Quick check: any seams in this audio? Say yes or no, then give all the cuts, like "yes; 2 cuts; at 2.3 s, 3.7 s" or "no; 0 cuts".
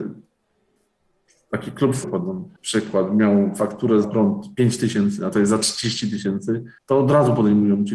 yes; 5 cuts; at 2.0 s, 2.6 s, 4.0 s, 5.3 s, 6.8 s